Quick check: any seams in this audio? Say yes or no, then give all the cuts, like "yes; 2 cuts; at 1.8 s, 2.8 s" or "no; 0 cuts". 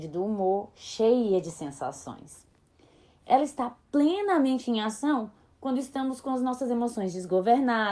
no; 0 cuts